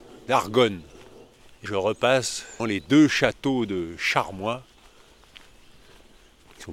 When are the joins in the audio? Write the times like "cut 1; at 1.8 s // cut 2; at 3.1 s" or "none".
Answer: cut 1; at 1.7 s // cut 2; at 2.6 s